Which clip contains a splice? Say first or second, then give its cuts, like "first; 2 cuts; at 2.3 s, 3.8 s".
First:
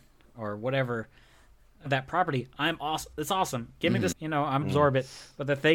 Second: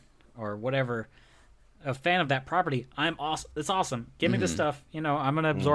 first; 3 cuts; at 1.9 s, 4.1 s, 4.6 s